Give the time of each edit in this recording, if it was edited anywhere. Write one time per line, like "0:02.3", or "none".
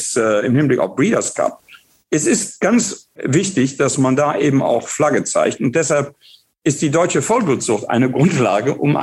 none